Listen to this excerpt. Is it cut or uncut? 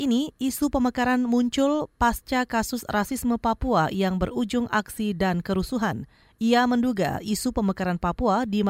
uncut